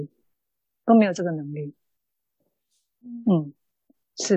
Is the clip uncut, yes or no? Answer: yes